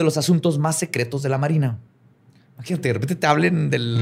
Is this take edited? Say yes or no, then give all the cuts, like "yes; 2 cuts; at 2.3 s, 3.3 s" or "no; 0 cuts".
no; 0 cuts